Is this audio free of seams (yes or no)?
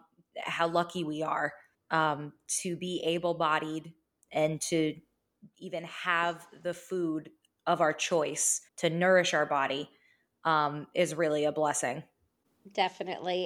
no